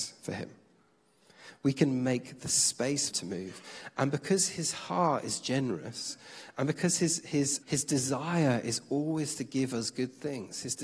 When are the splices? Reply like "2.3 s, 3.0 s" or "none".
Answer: 3.1 s, 7.6 s